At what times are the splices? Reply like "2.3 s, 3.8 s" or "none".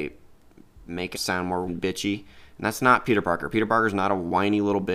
1.1 s, 1.7 s